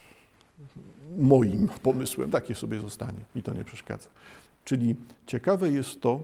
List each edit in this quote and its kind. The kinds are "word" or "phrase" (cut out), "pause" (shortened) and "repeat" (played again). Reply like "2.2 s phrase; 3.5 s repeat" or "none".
2.3 s phrase; 3.3 s pause; 4.4 s pause